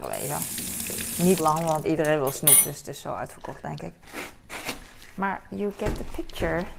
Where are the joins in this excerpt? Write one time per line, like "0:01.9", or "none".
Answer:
0:01.4
0:01.8